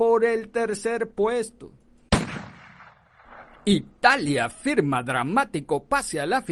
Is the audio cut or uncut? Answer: uncut